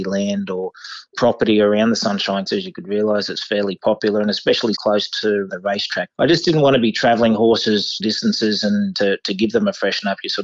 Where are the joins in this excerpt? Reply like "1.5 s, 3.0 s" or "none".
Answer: 1.1 s, 2.5 s, 4.7 s, 5.5 s, 6.1 s, 8.0 s, 8.9 s